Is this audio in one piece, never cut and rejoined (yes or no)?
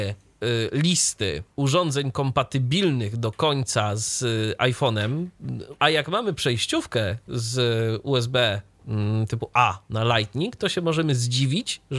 no